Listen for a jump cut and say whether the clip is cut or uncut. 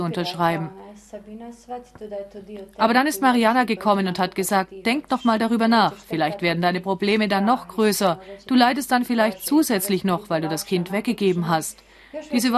uncut